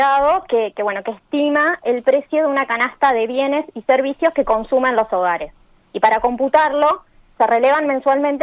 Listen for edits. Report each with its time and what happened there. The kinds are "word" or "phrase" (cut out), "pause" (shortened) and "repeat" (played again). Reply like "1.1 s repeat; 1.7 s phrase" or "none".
none